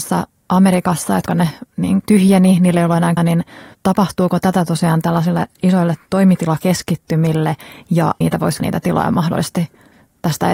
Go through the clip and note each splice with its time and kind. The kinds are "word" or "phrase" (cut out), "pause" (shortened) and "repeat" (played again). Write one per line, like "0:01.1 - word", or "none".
0:01.3 - word
0:02.0 - word
0:03.2 - word
0:03.7 - pause
0:08.2 - word
0:08.6 - word